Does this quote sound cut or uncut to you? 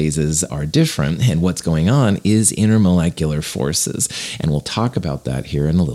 uncut